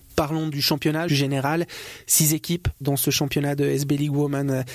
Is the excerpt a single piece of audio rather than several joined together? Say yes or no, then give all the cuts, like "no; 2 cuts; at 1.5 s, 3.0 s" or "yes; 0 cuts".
no; 2 cuts; at 1.1 s, 2.8 s